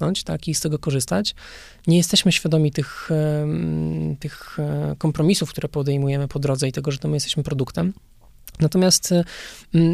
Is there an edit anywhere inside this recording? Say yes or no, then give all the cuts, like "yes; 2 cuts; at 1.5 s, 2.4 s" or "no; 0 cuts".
no; 0 cuts